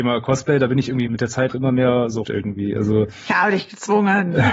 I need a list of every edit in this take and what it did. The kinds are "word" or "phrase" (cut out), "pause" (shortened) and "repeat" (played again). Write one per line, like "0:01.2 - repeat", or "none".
0:01.1 - phrase
0:01.5 - word
0:02.2 - word